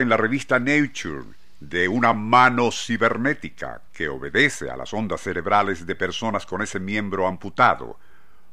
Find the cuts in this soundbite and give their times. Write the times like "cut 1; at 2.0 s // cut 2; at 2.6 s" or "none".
none